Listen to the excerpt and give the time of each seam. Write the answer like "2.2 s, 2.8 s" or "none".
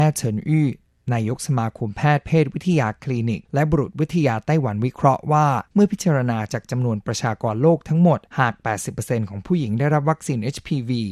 3.4 s, 5.7 s, 8.3 s

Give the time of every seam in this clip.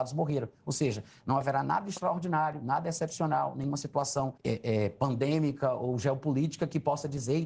4.4 s

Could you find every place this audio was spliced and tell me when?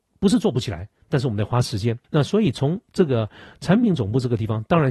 2.0 s

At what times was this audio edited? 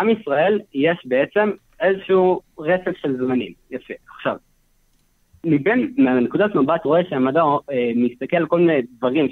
6.8 s

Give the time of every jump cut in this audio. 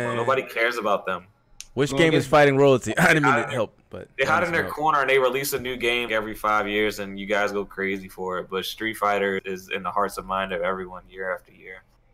6.1 s, 9.4 s

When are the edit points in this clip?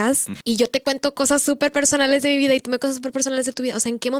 2.8 s

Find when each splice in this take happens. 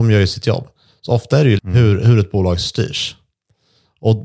1.6 s

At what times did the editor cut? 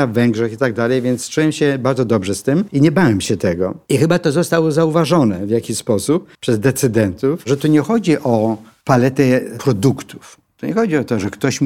6.3 s

